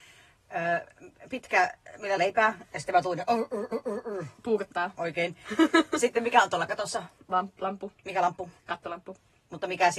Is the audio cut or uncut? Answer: cut